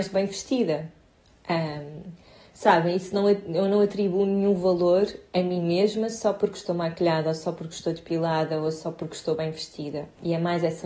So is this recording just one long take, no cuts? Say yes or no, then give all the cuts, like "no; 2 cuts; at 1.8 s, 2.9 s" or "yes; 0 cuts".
yes; 0 cuts